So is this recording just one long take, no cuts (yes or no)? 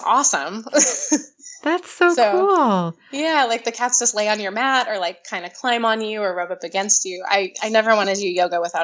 yes